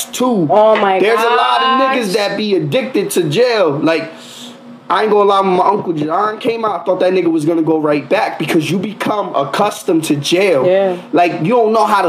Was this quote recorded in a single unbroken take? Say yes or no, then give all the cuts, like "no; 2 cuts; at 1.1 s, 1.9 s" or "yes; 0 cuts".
yes; 0 cuts